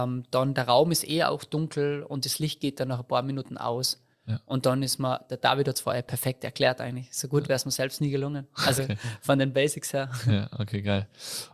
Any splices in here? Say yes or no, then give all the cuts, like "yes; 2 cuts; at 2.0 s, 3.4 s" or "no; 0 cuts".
yes; 1 cut; at 8.8 s